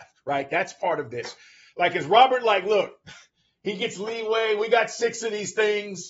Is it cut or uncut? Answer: uncut